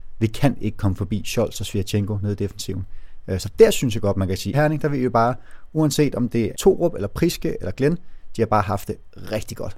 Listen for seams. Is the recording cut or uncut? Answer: cut